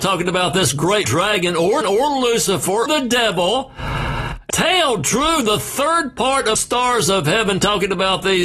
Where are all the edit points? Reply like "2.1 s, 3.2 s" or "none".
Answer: 1.0 s, 1.8 s, 2.9 s, 4.5 s, 6.6 s

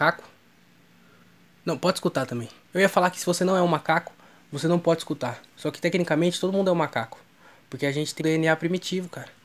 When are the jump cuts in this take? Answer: 8.2 s

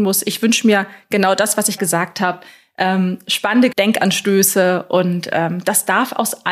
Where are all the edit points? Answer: 1.8 s, 3.7 s

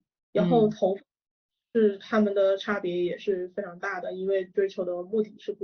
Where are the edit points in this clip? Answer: none

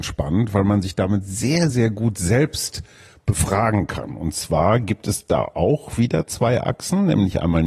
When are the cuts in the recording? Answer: none

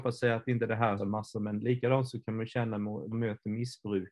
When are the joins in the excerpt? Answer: 1.0 s, 1.3 s, 3.1 s

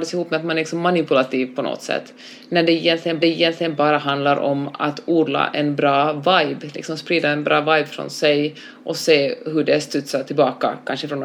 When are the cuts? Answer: 3.2 s

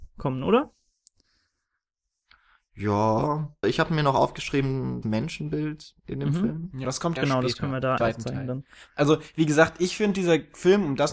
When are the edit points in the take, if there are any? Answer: 3.6 s, 5.0 s, 6.8 s, 7.2 s, 8.0 s

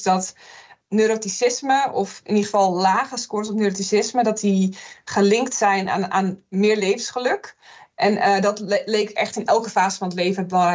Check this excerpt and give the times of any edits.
none

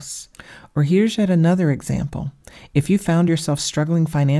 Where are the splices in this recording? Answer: none

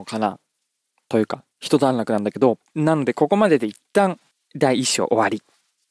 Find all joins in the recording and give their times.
2.7 s, 4.3 s

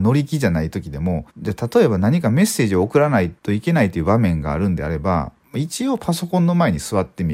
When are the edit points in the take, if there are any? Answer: 1.3 s, 3.4 s

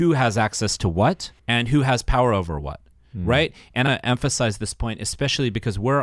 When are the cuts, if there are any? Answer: 1.4 s, 3.9 s

